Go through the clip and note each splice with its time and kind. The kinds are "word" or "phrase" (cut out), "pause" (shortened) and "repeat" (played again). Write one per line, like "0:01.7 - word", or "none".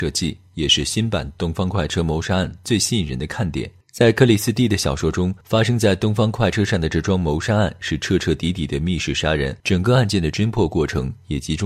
0:03.8 - pause
0:05.4 - pause
0:09.6 - pause